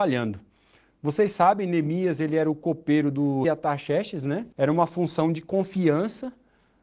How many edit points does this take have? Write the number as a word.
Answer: two